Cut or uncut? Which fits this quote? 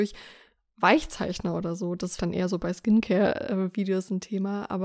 cut